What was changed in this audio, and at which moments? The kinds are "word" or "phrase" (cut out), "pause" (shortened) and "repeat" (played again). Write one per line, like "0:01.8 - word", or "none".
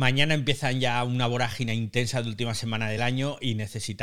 none